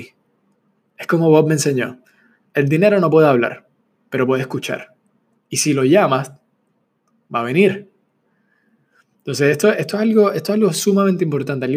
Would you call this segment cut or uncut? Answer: uncut